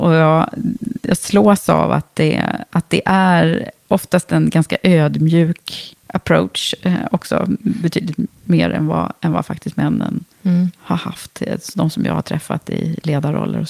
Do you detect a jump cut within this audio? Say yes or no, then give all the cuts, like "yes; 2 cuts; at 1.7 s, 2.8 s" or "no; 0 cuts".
yes; 2 cuts; at 6.0 s, 10.3 s